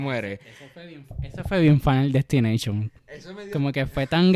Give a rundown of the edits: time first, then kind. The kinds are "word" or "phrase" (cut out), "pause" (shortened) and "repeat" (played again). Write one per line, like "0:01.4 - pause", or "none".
none